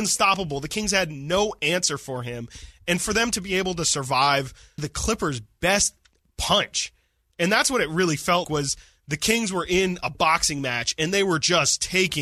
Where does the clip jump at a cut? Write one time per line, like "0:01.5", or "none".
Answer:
0:04.8
0:08.4